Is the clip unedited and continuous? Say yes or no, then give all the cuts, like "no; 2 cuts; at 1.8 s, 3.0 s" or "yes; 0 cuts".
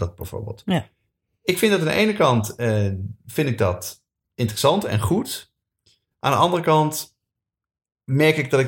yes; 0 cuts